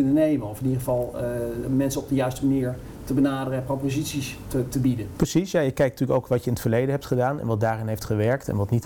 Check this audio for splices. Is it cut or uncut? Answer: uncut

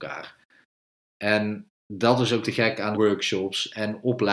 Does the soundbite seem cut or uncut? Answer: cut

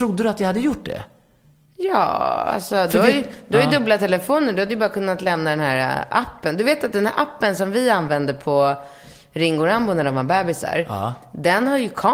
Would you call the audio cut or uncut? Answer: uncut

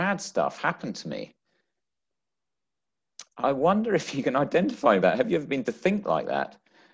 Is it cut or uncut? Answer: cut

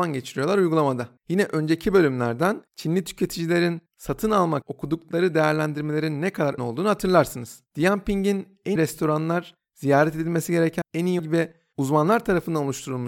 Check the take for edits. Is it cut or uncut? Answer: cut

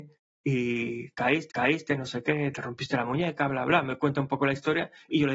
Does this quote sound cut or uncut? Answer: cut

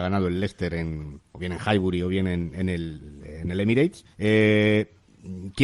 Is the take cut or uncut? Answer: cut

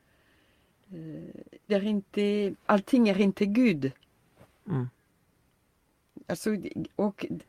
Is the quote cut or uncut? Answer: cut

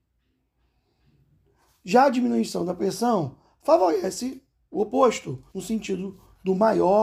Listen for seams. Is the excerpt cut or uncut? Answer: cut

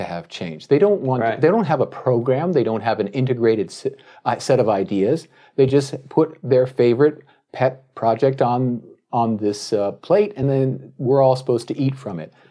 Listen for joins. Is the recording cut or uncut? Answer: uncut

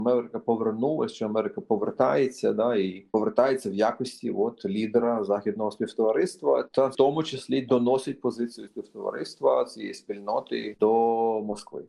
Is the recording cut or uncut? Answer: cut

